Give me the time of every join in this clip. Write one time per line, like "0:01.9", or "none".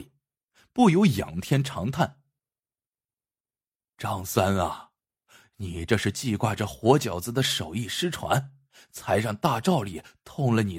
none